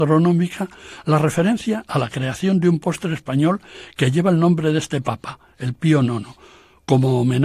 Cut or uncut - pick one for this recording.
uncut